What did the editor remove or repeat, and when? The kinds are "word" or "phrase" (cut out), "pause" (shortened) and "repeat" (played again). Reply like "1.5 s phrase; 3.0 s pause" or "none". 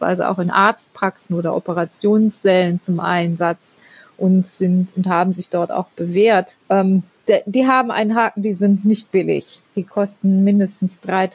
6.6 s pause